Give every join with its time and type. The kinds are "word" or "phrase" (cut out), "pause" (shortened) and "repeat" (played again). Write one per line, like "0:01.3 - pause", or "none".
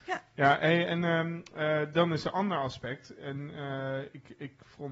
none